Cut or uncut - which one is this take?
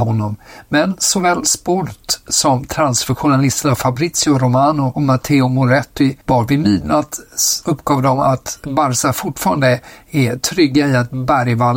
cut